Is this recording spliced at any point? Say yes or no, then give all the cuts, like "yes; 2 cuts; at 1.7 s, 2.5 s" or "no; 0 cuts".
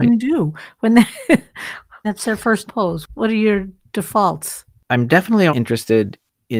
yes; 3 cuts; at 2.0 s, 2.7 s, 5.5 s